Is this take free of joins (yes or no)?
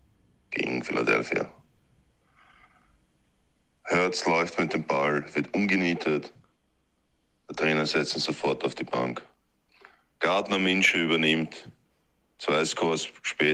yes